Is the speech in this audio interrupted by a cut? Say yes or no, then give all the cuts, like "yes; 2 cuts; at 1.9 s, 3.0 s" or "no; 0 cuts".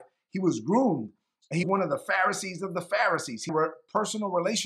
yes; 2 cuts; at 1.6 s, 3.5 s